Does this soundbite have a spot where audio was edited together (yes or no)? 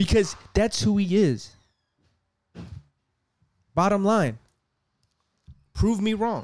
no